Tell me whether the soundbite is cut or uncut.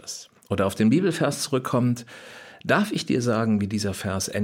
uncut